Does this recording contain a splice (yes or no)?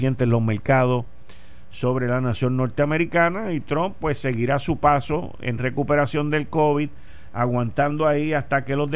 no